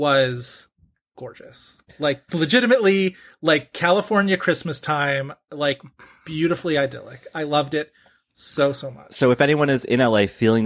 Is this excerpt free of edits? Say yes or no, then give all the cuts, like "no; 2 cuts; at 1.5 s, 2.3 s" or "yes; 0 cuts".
yes; 0 cuts